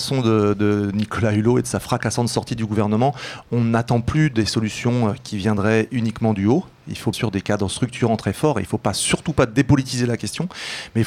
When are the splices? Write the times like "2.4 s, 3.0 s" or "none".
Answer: 7.1 s